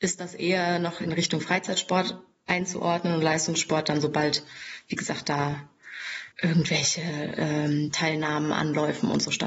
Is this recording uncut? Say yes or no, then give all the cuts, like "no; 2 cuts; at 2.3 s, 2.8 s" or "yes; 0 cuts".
no; 1 cut; at 6.3 s